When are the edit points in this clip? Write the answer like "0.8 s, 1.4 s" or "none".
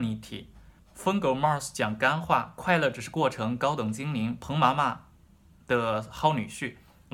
none